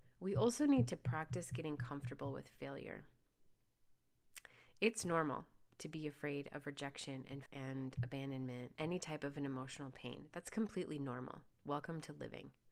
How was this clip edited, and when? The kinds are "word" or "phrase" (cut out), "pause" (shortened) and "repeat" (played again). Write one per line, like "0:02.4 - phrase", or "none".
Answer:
0:07.5 - word
0:08.8 - word